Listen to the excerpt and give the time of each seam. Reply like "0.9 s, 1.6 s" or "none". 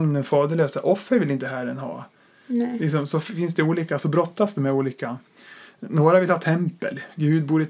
none